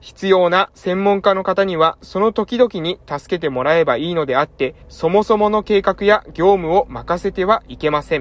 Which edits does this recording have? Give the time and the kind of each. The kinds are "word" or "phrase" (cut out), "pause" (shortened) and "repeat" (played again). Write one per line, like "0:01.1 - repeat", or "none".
0:04.8 - pause